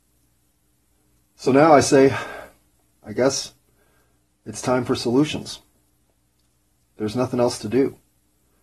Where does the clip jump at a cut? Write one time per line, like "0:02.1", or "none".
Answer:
none